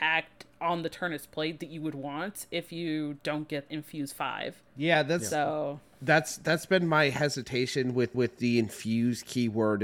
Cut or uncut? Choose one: cut